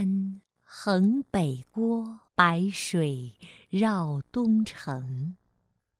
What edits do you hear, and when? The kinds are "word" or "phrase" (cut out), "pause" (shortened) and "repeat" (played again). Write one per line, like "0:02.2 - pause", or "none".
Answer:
0:02.3 - pause